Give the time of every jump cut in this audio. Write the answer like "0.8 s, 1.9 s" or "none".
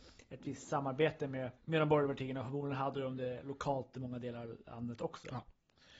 1.6 s